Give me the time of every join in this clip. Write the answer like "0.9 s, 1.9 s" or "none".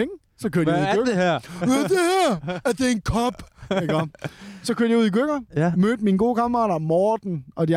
5.5 s